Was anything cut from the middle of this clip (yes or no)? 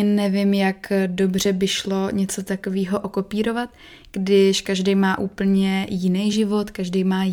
no